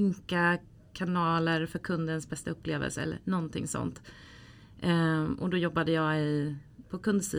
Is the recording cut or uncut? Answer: uncut